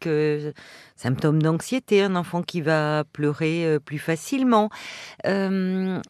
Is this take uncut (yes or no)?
yes